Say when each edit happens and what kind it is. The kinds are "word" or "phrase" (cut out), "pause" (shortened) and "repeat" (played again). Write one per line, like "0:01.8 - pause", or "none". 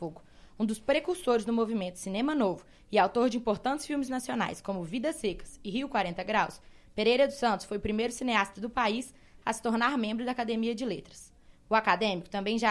none